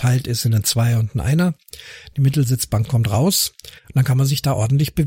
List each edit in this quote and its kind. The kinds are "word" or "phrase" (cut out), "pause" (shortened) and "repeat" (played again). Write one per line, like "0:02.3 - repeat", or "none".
0:03.8 - pause